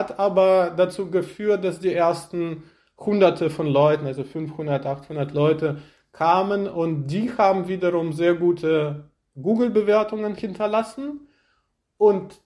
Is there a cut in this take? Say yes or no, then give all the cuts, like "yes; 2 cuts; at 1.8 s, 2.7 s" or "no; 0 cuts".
no; 0 cuts